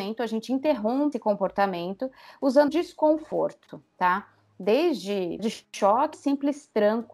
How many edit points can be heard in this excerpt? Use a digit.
4